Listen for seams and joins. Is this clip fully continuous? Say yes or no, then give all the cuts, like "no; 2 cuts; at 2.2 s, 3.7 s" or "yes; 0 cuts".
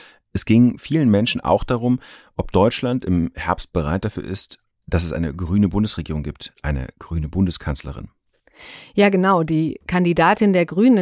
yes; 0 cuts